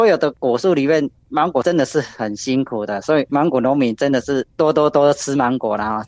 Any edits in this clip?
yes; 1 cut; at 3.3 s

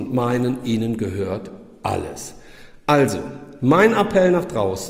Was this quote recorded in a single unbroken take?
yes; 0 cuts

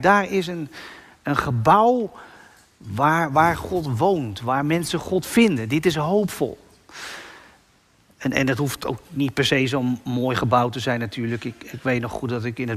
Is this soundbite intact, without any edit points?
yes; 0 cuts

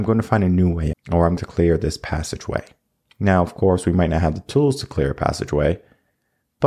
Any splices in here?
yes; 2 cuts; at 0.9 s, 1.4 s

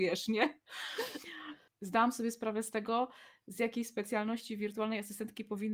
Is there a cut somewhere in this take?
no; 0 cuts

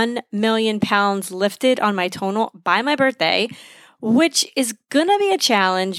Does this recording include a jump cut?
no; 0 cuts

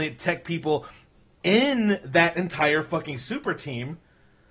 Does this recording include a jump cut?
no; 0 cuts

